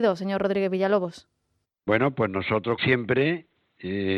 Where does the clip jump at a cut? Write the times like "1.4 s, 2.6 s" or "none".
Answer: 1.6 s, 2.8 s